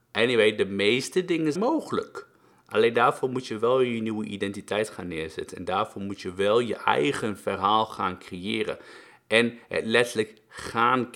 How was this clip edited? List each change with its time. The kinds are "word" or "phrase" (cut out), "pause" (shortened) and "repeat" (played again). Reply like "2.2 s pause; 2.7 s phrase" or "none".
1.6 s word